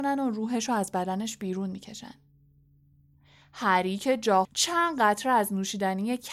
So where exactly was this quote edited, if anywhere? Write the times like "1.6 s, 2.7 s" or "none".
4.4 s